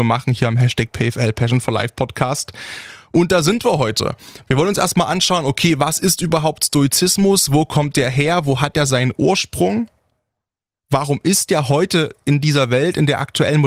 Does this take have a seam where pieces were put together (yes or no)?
no